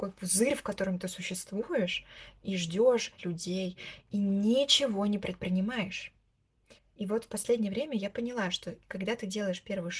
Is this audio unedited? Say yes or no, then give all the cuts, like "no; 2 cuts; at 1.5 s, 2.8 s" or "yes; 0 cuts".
no; 2 cuts; at 3.2 s, 6.8 s